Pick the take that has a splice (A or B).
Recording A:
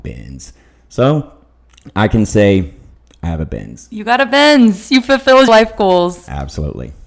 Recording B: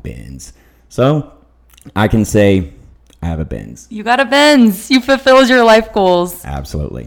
A